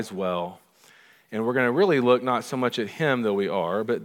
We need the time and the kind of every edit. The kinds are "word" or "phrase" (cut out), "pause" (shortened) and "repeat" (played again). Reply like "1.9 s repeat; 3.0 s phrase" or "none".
none